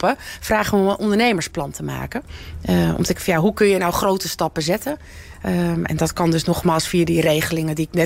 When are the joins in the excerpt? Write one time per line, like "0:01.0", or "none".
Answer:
0:03.2